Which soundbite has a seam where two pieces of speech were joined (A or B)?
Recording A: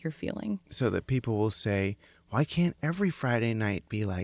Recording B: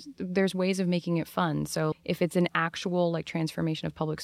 B